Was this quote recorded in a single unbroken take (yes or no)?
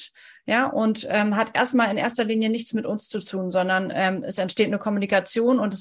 yes